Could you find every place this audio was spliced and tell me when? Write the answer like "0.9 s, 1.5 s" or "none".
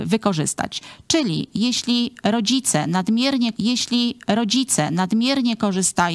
3.5 s

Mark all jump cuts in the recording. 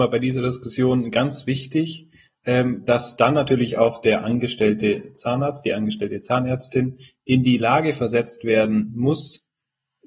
none

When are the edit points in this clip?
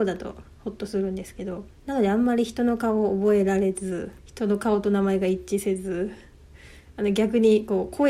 4.2 s

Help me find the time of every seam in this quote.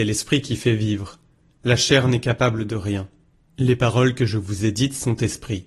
none

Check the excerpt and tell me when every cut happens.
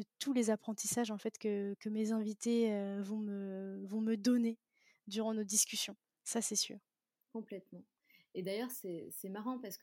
none

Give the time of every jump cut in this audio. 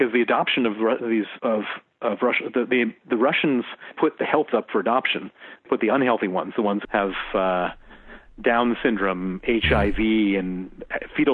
1.4 s, 3.0 s, 3.9 s, 4.5 s, 5.7 s, 6.8 s

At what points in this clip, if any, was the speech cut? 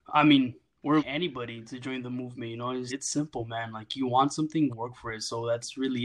1.0 s, 2.9 s, 4.7 s

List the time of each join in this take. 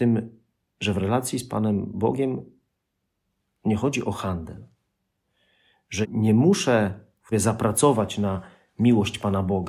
6.0 s, 7.3 s

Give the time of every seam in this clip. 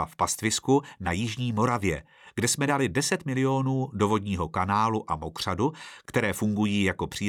none

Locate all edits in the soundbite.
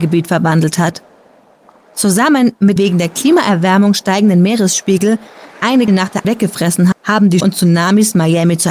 2.8 s, 5.5 s, 5.9 s, 6.2 s, 6.9 s, 7.4 s

